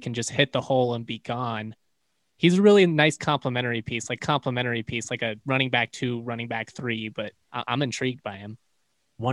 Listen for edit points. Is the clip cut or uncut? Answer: cut